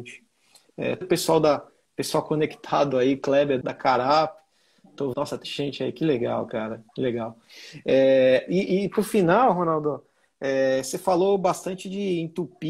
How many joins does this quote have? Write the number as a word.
five